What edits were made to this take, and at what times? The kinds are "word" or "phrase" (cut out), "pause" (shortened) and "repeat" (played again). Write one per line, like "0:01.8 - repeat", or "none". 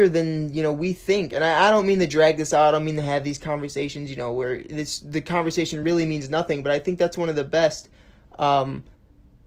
none